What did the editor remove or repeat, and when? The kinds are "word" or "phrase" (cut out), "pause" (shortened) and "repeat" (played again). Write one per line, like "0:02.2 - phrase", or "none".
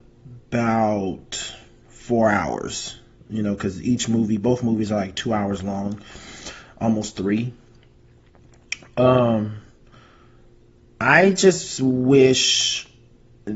none